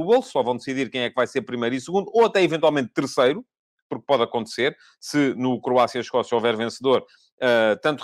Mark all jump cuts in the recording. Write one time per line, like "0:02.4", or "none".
none